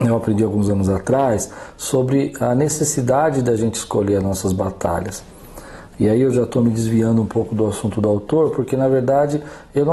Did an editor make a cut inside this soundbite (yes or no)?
no